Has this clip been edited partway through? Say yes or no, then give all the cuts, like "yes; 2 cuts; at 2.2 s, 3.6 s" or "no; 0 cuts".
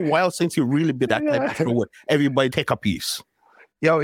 yes; 2 cuts; at 1.1 s, 2.5 s